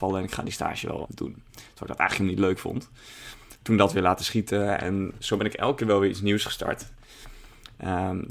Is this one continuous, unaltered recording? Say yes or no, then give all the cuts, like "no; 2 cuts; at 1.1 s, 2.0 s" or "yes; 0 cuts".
no; 1 cut; at 1.0 s